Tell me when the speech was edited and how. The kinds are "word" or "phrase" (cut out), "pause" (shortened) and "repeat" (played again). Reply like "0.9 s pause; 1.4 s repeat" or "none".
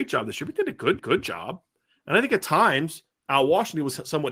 1.0 s repeat